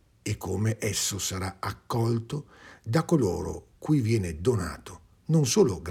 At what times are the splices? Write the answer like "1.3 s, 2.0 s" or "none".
none